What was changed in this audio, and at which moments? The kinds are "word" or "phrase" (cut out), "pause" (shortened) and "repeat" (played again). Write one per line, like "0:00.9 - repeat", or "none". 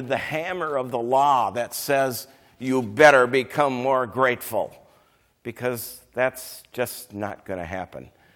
none